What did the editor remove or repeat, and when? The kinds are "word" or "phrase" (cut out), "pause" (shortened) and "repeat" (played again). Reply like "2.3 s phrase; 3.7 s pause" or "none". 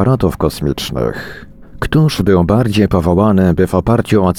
none